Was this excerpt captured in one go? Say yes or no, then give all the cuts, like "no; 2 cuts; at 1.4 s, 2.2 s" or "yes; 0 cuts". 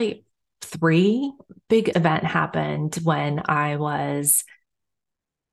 no; 1 cut; at 1.9 s